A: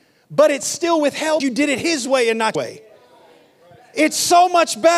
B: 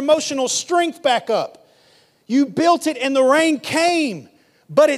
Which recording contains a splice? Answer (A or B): A